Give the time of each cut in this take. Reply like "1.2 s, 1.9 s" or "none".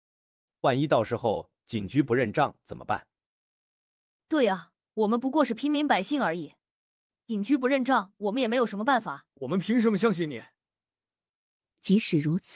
4.8 s, 9.3 s